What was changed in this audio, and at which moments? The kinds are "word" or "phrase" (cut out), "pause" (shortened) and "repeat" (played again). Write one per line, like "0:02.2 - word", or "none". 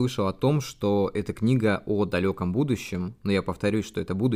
none